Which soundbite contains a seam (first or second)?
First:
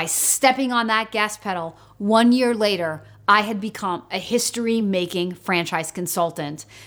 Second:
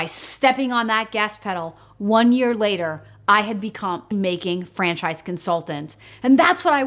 second